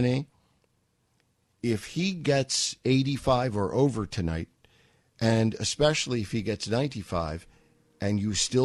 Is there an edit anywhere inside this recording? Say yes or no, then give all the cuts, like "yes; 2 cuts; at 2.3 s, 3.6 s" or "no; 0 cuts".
no; 0 cuts